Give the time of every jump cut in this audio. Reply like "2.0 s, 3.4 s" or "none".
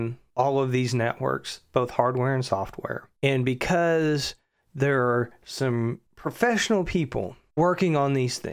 none